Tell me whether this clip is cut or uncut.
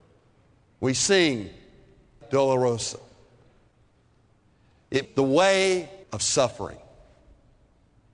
cut